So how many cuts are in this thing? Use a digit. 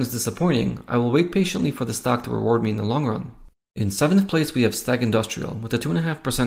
0